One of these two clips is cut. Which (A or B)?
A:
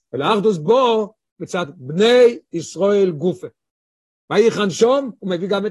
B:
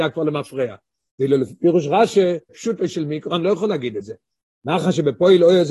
B